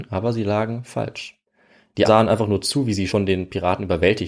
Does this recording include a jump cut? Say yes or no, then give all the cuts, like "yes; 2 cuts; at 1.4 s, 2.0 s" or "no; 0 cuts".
yes; 2 cuts; at 2.0 s, 3.1 s